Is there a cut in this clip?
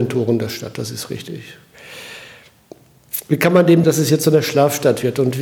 yes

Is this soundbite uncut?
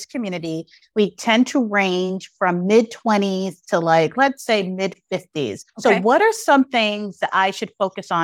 no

